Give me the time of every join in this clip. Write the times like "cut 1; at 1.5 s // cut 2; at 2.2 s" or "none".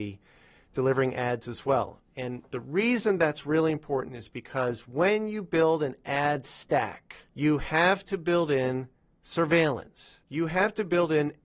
cut 1; at 7.3 s // cut 2; at 10.3 s